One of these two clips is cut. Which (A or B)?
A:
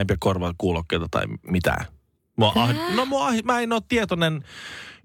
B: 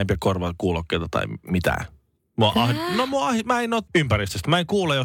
B